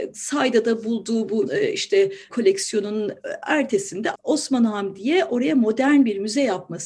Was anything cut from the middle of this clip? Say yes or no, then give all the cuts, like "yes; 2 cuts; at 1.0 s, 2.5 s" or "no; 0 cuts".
yes; 3 cuts; at 1.5 s, 2.3 s, 4.1 s